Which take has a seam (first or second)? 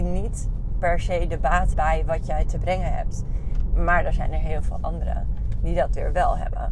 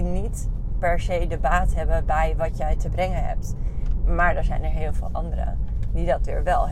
first